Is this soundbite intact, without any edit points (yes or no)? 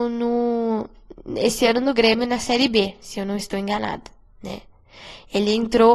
yes